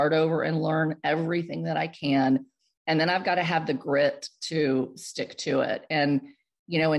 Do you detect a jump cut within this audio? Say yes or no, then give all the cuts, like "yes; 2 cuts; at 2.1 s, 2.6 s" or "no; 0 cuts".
no; 0 cuts